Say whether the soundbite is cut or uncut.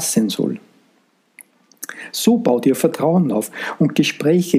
uncut